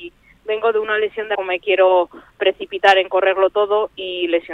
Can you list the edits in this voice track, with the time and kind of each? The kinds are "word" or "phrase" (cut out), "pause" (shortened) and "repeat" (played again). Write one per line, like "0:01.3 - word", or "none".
0:01.3 - phrase